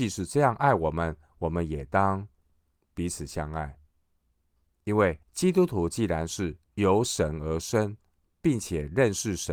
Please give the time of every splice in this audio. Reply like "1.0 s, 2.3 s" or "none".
3.9 s, 5.2 s, 6.6 s